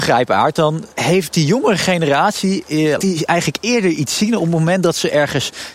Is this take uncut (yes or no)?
no